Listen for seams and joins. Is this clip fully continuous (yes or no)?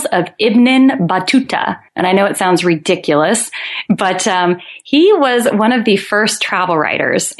no